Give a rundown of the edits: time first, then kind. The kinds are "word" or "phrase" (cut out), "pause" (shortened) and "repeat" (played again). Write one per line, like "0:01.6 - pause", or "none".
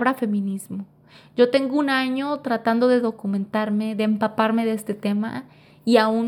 none